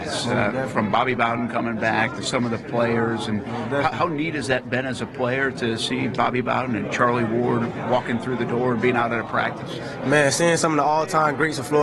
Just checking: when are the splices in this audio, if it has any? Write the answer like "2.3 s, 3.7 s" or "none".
none